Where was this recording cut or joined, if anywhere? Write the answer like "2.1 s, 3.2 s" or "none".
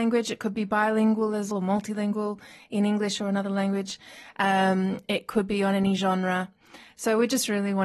1.5 s